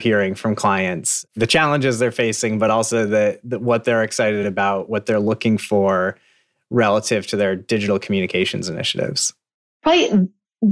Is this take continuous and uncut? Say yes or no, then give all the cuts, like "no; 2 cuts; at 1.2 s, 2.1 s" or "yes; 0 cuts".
yes; 0 cuts